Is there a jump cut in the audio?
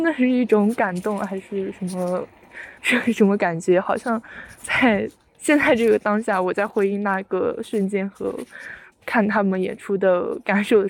yes; 2 cuts; at 2.8 s, 4.6 s

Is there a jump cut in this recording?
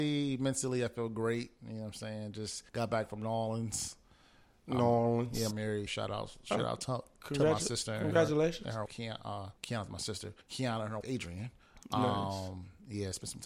yes; 8 cuts; at 1.6 s, 2.7 s, 5.5 s, 5.9 s, 8.9 s, 9.6 s, 10.4 s, 11.0 s

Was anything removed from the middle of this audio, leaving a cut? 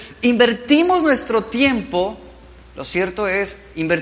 no; 0 cuts

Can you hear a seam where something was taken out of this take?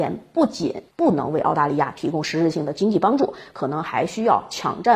yes; 1 cut; at 0.9 s

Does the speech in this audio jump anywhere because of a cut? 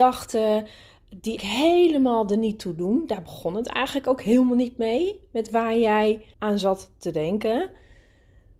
yes; 2 cuts; at 1.4 s, 6.3 s

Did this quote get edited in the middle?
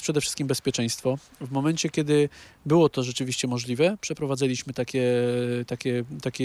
no; 0 cuts

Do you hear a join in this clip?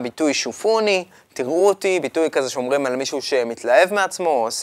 no; 0 cuts

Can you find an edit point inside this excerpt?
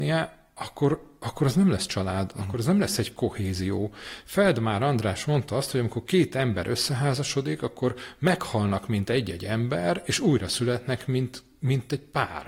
no; 0 cuts

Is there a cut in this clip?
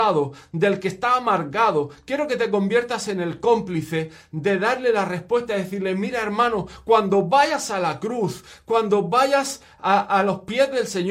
no; 0 cuts

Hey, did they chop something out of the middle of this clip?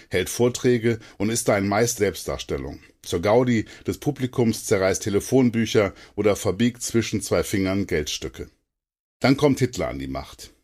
yes; 2 cuts; at 2.0 s, 5.0 s

